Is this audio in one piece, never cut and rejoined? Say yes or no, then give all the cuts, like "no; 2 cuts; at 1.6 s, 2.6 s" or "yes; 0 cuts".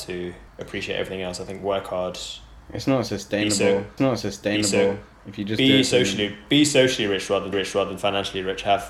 no; 2 cuts; at 4.0 s, 7.5 s